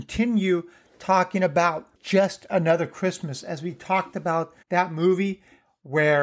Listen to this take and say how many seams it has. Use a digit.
2